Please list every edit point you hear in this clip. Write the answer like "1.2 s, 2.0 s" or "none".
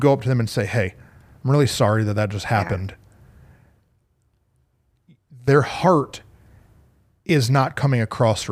none